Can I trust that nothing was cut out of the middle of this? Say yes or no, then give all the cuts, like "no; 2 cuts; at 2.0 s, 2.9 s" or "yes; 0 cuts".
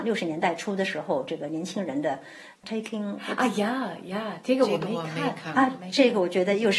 yes; 0 cuts